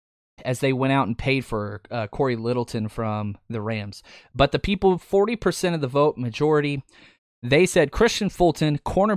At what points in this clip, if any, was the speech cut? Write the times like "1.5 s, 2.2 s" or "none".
none